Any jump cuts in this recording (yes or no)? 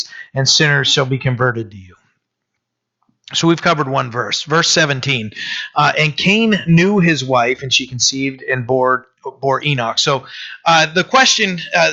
no